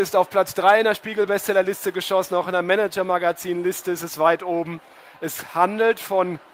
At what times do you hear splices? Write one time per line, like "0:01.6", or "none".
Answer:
none